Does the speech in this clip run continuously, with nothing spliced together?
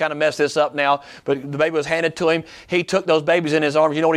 yes; 0 cuts

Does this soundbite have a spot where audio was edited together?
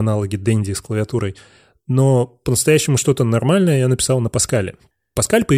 no; 0 cuts

